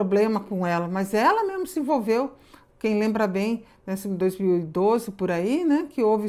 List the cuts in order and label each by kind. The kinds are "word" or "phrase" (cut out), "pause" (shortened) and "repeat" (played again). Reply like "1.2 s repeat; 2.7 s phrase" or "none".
none